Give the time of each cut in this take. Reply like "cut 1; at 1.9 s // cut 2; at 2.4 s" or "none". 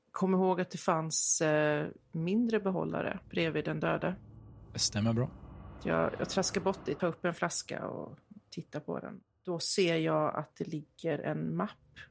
cut 1; at 3.2 s // cut 2; at 7.0 s

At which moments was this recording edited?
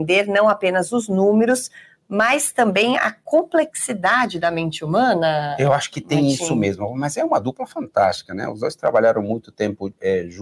none

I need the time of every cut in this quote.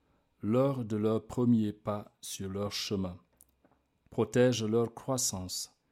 none

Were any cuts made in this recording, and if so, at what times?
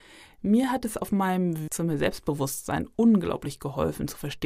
cut 1; at 1.7 s

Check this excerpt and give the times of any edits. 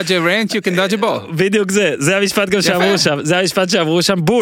none

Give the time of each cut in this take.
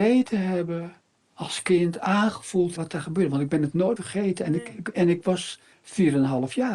cut 1; at 1.2 s // cut 2; at 2.8 s // cut 3; at 4.0 s // cut 4; at 5.7 s

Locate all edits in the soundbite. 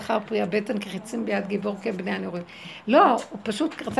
none

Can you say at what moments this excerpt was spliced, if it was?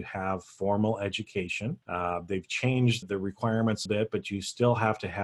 cut 1; at 1.8 s // cut 2; at 3.0 s // cut 3; at 3.9 s

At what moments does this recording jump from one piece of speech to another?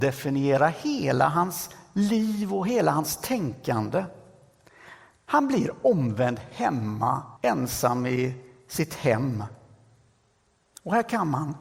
cut 1; at 7.4 s

